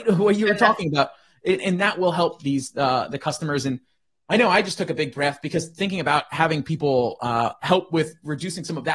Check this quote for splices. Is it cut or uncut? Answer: uncut